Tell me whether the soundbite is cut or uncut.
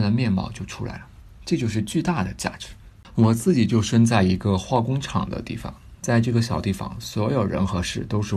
cut